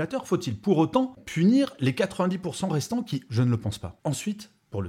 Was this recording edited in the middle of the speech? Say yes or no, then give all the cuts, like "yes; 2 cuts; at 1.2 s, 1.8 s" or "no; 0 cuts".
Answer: yes; 2 cuts; at 1.2 s, 3.3 s